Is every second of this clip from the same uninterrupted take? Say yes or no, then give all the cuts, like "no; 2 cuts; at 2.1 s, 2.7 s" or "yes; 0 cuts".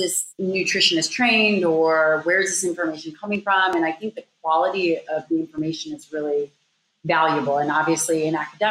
yes; 0 cuts